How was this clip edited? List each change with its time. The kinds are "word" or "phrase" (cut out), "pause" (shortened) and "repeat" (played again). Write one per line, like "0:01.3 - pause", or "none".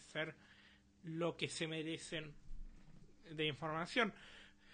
none

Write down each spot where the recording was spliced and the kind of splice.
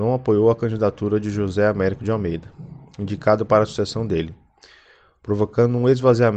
none

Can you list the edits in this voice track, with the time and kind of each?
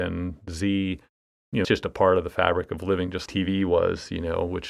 0:01.6 - word
0:03.3 - word

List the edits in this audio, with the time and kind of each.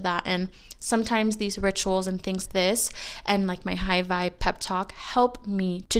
0:02.5 - word

